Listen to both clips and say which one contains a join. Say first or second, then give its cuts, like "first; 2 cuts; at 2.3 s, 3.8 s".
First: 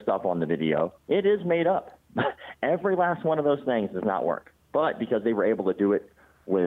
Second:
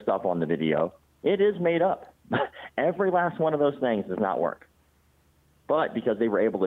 first; 2 cuts; at 1.0 s, 4.6 s